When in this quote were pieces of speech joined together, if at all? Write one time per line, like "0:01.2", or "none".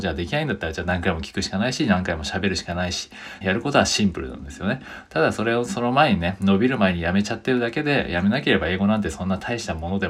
0:03.4

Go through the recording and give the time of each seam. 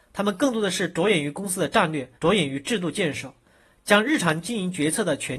0:02.2

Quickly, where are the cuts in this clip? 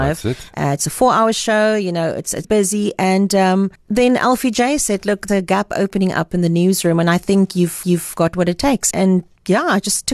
0:02.4
0:03.8
0:05.3
0:07.8
0:08.9

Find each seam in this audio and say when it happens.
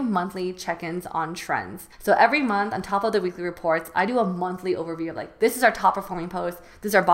0:01.9

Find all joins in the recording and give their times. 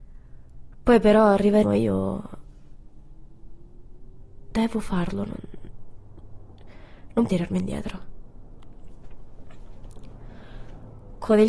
0:01.6
0:07.3

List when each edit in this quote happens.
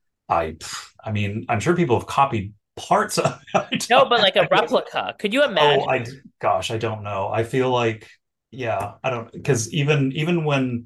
none

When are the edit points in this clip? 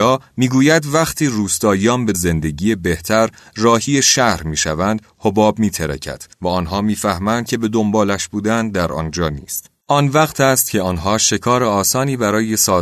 0:02.1
0:06.3
0:07.5
0:09.8

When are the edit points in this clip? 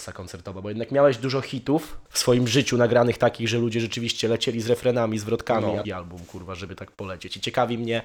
0:02.1
0:05.8

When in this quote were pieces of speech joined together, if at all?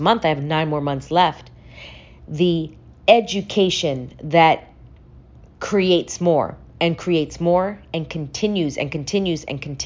none

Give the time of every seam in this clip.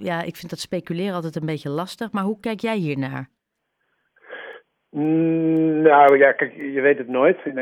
none

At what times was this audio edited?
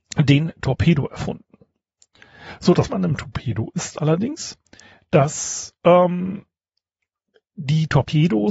0:02.9

